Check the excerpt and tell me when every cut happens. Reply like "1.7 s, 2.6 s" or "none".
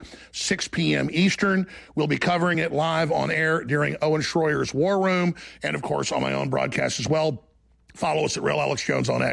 none